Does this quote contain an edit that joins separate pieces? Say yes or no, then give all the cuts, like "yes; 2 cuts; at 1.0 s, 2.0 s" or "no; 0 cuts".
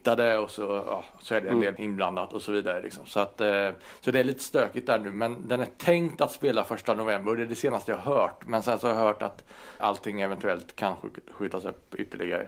yes; 2 cuts; at 1.8 s, 9.8 s